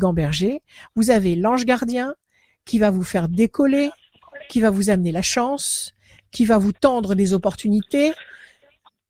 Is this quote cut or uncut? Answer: uncut